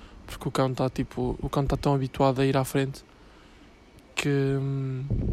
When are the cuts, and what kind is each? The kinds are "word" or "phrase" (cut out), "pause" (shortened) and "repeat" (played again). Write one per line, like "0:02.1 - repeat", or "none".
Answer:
none